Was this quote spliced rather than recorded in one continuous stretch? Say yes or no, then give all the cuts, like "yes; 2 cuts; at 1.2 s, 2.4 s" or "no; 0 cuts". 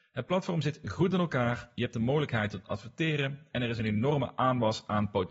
no; 0 cuts